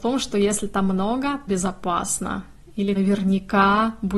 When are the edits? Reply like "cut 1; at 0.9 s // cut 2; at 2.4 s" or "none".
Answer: cut 1; at 1.5 s // cut 2; at 2.9 s